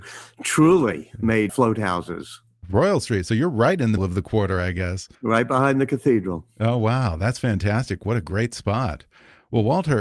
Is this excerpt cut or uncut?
cut